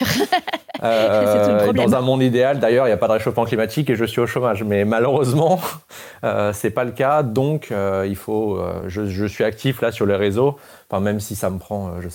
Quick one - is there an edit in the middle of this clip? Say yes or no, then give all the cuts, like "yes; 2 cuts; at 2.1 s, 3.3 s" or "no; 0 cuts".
no; 0 cuts